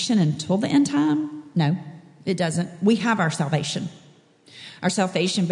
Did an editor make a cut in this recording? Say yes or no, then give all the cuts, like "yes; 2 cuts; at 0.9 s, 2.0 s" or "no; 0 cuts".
no; 0 cuts